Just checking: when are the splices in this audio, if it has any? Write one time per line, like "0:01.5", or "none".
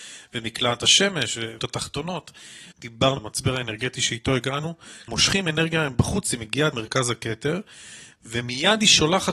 0:01.6
0:03.2
0:05.1
0:06.7